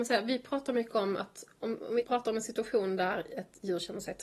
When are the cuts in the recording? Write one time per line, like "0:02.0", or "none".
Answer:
none